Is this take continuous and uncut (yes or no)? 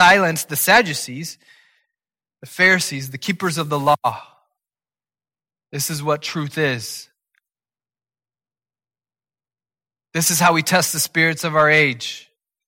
yes